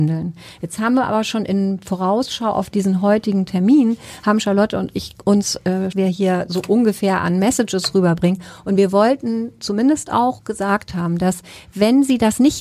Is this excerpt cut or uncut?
cut